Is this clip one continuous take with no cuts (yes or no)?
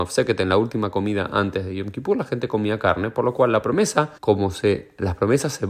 no